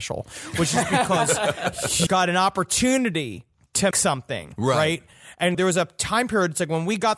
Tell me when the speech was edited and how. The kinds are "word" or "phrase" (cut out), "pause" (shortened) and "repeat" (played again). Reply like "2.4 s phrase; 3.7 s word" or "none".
2.1 s word; 3.9 s word; 5.5 s word